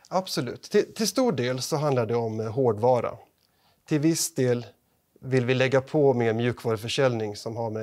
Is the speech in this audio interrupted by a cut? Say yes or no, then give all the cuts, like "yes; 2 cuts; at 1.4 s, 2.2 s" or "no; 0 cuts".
no; 0 cuts